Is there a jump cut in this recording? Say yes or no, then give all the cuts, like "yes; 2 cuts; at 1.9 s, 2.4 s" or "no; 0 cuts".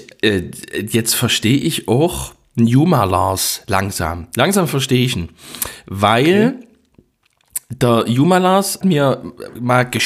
yes; 1 cut; at 8.8 s